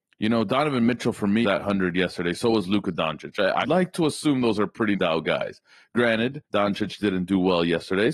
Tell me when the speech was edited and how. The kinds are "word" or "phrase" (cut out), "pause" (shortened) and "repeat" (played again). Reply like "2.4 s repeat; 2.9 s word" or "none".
1.4 s word; 3.6 s word; 4.9 s word; 6.4 s pause

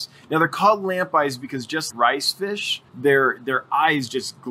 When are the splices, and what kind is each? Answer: 1.9 s word; 2.9 s pause

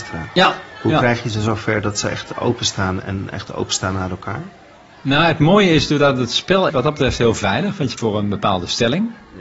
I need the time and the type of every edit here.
6.7 s word; 8.0 s word

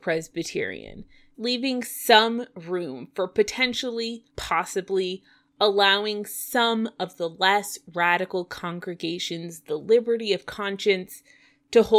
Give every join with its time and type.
1.3 s word; 4.3 s pause

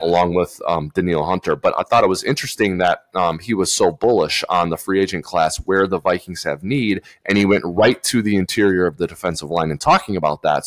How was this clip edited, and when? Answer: none

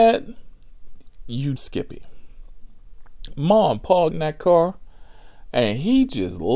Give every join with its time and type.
1.6 s word; 4.1 s word

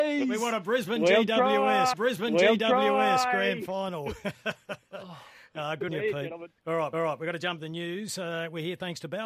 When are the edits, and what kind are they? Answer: 1.9 s repeat; 5.9 s word; 6.6 s pause; 6.9 s repeat; 7.6 s word

